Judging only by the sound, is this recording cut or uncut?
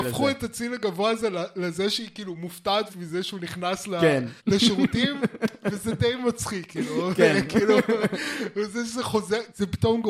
cut